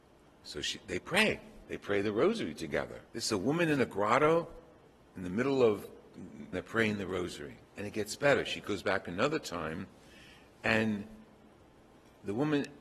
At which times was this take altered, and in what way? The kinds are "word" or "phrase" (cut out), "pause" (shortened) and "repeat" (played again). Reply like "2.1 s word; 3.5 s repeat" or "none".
3.1 s pause; 6.5 s phrase; 7.7 s pause